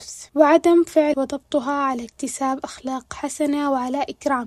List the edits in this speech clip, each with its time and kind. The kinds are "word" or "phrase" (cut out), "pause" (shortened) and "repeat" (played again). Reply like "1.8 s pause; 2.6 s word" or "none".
1.1 s word